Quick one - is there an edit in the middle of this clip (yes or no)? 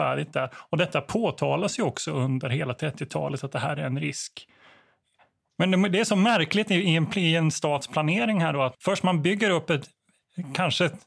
yes